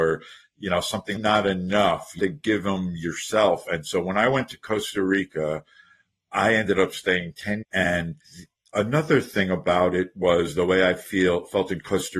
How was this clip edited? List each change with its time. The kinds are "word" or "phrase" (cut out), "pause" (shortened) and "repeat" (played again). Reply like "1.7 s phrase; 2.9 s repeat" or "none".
1.2 s phrase; 2.2 s word; 3.7 s word; 7.6 s word; 8.2 s pause